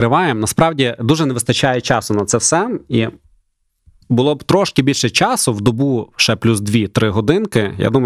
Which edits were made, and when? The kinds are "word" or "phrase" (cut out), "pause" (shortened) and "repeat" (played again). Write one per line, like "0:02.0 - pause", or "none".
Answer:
none